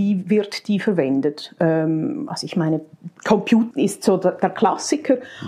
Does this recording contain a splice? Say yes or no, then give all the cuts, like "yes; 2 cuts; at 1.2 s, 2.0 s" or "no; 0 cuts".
yes; 1 cut; at 3.7 s